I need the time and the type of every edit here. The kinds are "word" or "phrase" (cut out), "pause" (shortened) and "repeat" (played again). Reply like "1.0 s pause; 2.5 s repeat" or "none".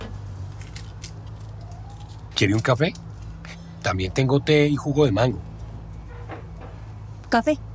none

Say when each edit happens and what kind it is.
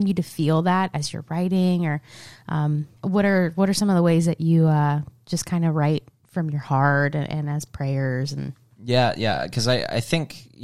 3.0 s pause

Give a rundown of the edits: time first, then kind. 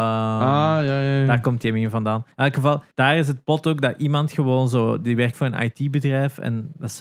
2.3 s pause; 2.9 s pause; 5.3 s word

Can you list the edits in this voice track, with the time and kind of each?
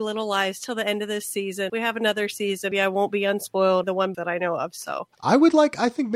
1.7 s word; 2.7 s word; 3.8 s phrase; 4.1 s word; 5.1 s pause

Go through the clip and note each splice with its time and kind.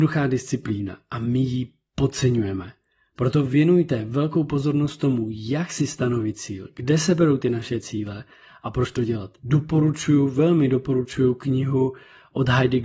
none

